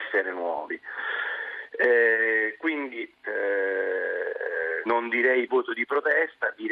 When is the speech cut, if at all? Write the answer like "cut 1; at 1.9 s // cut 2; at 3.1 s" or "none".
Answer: cut 1; at 4.9 s // cut 2; at 5.5 s